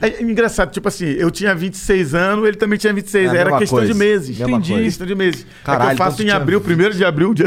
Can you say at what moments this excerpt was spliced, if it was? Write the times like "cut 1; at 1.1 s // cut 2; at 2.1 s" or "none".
none